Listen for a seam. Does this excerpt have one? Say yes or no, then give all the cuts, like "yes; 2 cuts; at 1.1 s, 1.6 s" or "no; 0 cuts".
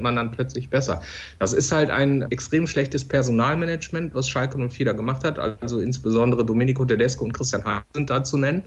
no; 0 cuts